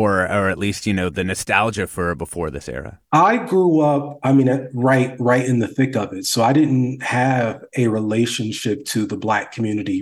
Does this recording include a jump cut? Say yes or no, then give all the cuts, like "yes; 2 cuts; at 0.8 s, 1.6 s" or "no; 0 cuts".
yes; 1 cut; at 3.0 s